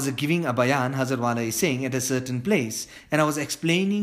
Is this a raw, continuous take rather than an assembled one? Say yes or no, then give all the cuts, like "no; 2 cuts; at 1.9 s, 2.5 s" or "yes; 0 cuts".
yes; 0 cuts